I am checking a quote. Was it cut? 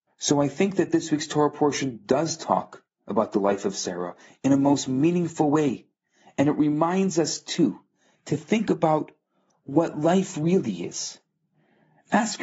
no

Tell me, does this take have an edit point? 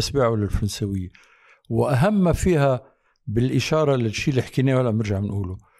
no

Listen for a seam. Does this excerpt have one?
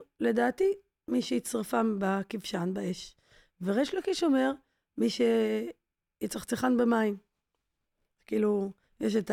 no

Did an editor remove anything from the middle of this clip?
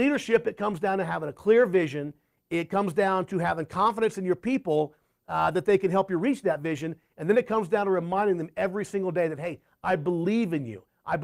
no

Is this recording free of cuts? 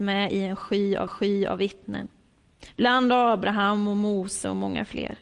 no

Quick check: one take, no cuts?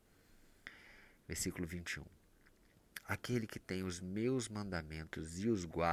yes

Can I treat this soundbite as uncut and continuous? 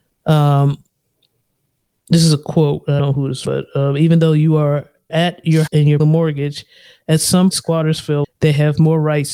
no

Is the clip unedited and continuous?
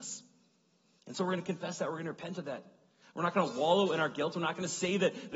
yes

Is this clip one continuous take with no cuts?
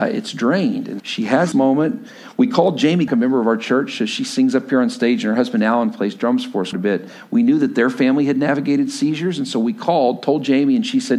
no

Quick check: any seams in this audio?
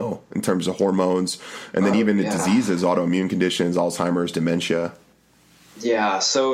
no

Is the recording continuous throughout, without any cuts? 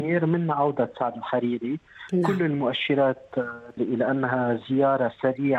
no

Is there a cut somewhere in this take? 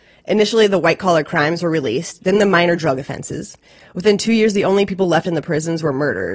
no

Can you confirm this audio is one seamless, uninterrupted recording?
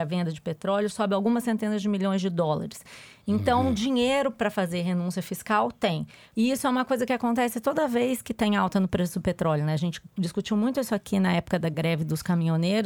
yes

